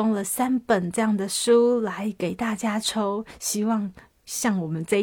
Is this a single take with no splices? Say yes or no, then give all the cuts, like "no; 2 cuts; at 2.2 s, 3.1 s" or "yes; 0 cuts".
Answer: yes; 0 cuts